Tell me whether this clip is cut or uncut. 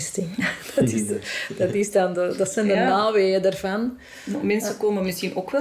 uncut